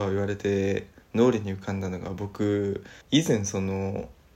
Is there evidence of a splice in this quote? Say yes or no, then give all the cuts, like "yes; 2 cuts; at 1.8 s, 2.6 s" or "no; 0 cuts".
yes; 1 cut; at 3.0 s